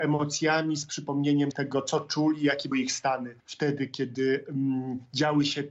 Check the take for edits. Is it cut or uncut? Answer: cut